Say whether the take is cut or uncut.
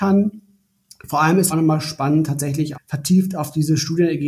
cut